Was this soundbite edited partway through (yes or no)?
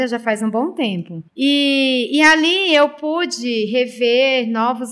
yes